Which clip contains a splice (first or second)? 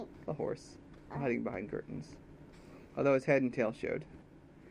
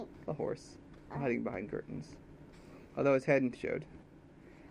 second